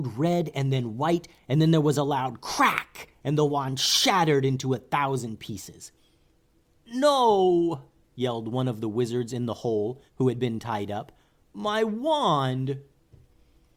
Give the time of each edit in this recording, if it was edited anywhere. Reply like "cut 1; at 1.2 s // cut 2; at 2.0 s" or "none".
cut 1; at 10.1 s